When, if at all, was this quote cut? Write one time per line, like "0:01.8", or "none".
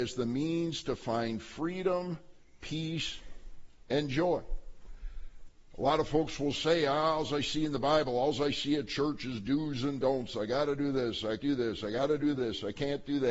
0:11.4